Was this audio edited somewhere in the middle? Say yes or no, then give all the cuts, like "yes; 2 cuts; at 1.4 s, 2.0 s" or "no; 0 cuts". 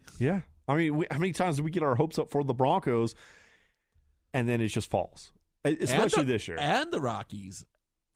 no; 0 cuts